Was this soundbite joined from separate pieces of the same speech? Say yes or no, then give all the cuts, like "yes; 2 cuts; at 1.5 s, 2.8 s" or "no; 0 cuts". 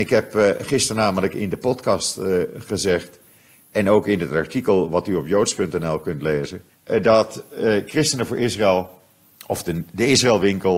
yes; 1 cut; at 6.7 s